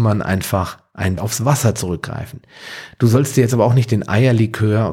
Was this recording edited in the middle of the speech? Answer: yes; 1 cut; at 1.2 s

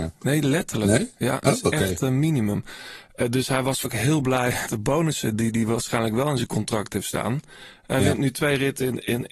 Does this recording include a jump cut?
yes; 3 cuts; at 1.4 s, 3.8 s, 4.7 s

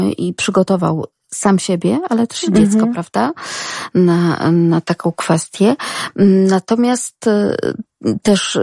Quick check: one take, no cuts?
yes; 0 cuts

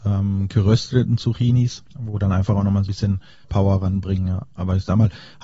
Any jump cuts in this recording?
yes; 3 cuts; at 1.9 s, 2.9 s, 3.4 s

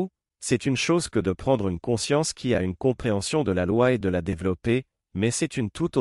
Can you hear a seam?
no; 0 cuts

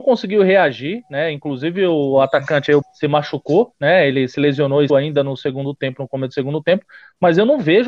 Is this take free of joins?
no; 2 cuts; at 2.8 s, 4.9 s

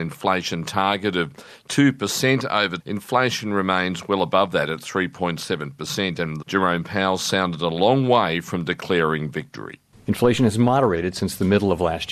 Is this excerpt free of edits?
no; 2 cuts; at 2.8 s, 6.4 s

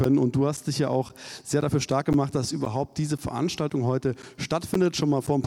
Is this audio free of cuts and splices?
yes; 0 cuts

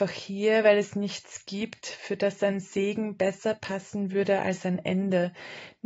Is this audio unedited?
yes; 0 cuts

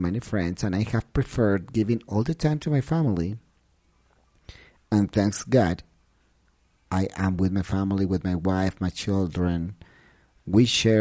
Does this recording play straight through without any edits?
yes; 0 cuts

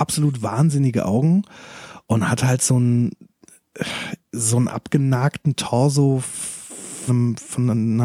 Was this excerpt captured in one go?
no; 2 cuts; at 4.2 s, 7.1 s

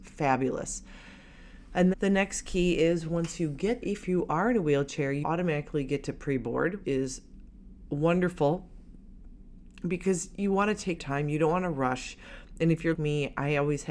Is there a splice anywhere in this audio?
yes; 6 cuts; at 1.9 s, 3.8 s, 5.2 s, 6.8 s, 11.0 s, 12.9 s

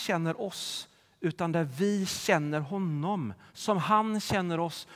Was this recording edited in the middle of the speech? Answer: no; 0 cuts

